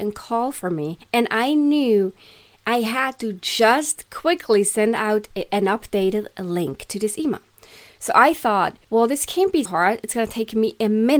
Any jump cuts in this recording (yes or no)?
yes